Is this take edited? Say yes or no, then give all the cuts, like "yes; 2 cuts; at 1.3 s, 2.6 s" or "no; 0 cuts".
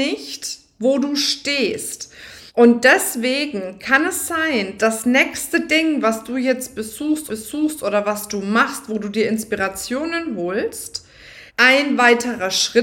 yes; 4 cuts; at 2.5 s, 4.8 s, 7.3 s, 11.5 s